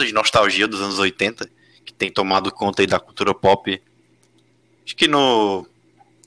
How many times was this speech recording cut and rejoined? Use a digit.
0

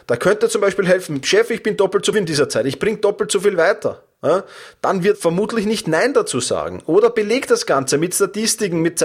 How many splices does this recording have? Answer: 2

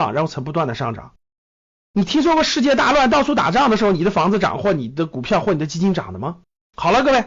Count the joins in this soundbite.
0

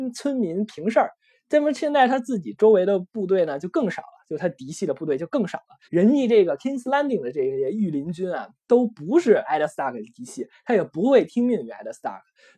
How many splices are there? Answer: 1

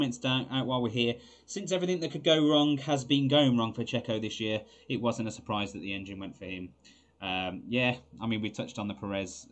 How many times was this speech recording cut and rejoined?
0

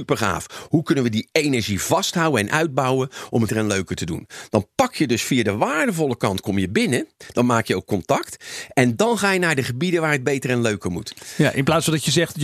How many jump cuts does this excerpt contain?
1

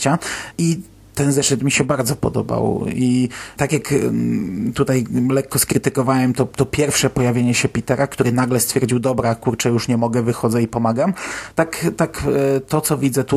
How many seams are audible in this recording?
0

